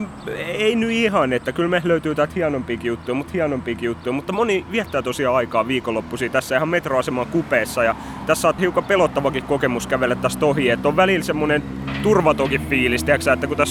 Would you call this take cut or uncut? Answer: cut